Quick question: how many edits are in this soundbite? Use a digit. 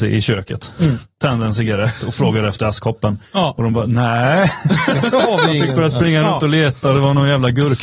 0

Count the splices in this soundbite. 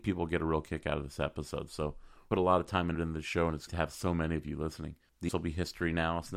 4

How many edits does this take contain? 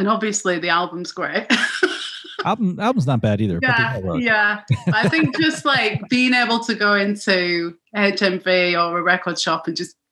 1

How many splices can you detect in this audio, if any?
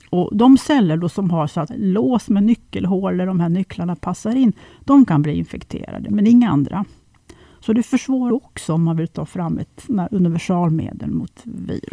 2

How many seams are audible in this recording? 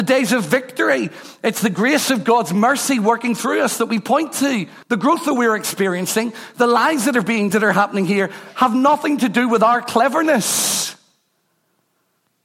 2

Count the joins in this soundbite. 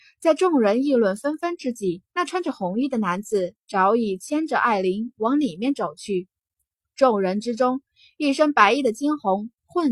1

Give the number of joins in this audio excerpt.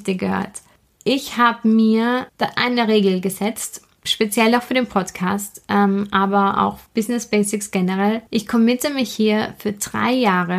4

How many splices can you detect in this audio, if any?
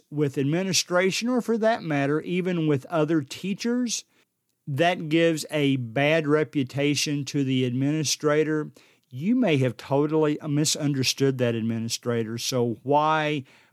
0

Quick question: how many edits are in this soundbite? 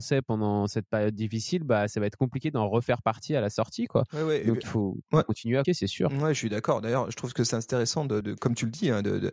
3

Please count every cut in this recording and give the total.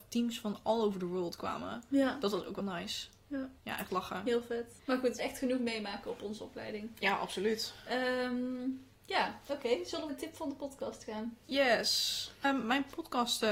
7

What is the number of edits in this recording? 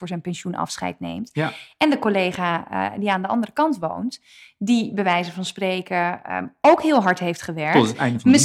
0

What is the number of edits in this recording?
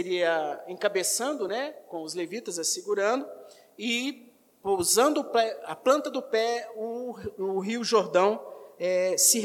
0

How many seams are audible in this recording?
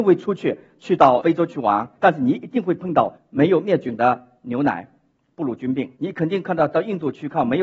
1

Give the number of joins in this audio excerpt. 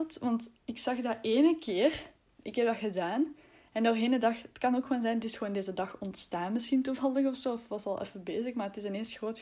0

